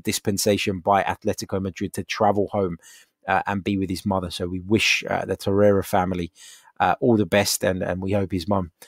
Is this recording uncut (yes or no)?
yes